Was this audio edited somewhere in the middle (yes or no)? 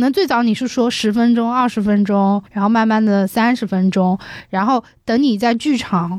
yes